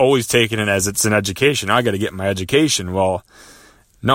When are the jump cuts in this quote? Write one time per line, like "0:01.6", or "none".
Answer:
none

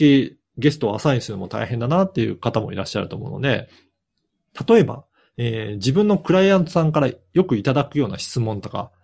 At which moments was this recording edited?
none

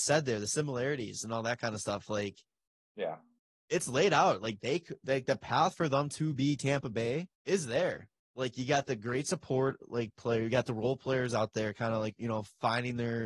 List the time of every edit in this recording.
0:03.4
0:07.3
0:08.2

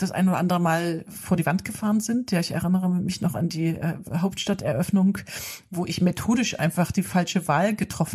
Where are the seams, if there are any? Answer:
none

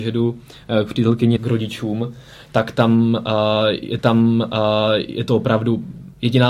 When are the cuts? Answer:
0:01.4
0:04.0

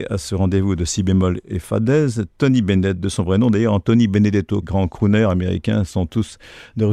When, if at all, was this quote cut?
0:04.6

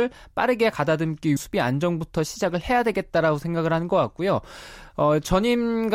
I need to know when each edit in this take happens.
0:01.4

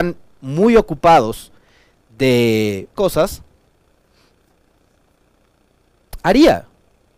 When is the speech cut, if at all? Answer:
0:02.9

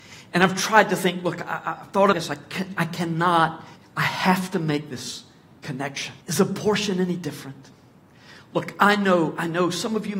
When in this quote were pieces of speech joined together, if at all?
0:02.1
0:03.8
0:06.2

